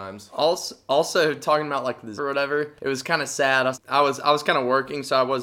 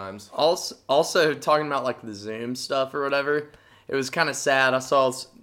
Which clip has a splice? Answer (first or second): first